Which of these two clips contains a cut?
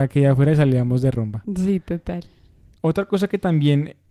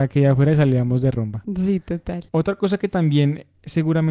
second; 1 cut; at 2.3 s

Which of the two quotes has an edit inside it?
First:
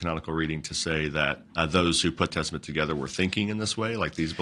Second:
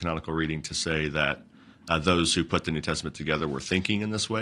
first; 2 cuts; at 1.5 s, 2.3 s

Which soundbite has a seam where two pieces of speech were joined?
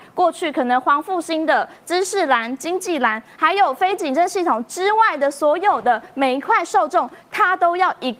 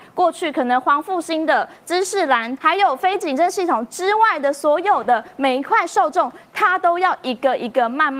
second; 1 cut; at 2.6 s

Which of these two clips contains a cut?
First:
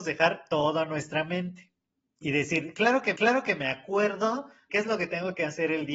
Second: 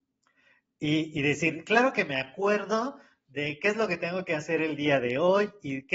first; 3 cuts; at 2.2 s, 3.1 s, 4.7 s

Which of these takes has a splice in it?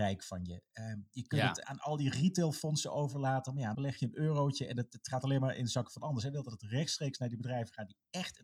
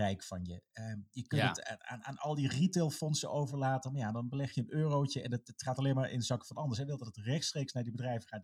first; 2 cuts; at 1.6 s, 3.7 s

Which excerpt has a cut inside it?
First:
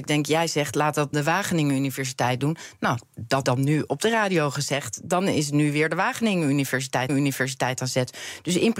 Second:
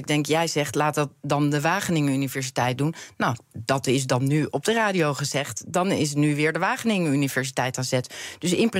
first; 3 cuts; at 1.1 s, 3.4 s, 7.1 s

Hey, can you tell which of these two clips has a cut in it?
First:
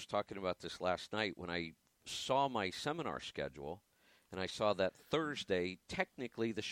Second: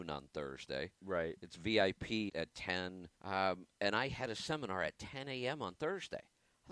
second; 2 cuts; at 2.3 s, 3.1 s

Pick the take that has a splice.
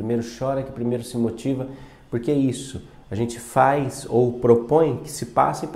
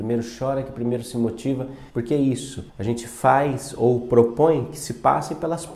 second; 2 cuts; at 1.9 s, 2.7 s

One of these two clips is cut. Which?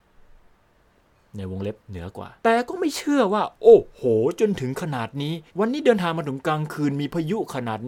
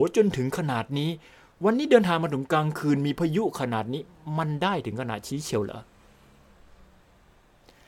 first; 3 cuts; at 1.8 s, 2.4 s, 5.5 s

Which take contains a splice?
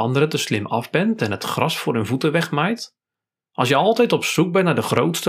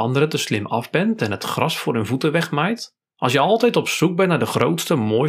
second; 1 cut; at 3.0 s

